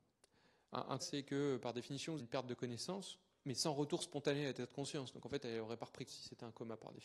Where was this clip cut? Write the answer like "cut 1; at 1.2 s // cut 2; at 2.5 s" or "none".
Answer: cut 1; at 1.0 s // cut 2; at 2.2 s // cut 3; at 6.1 s